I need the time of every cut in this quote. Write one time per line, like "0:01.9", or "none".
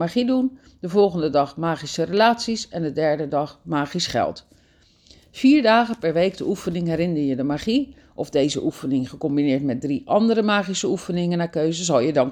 none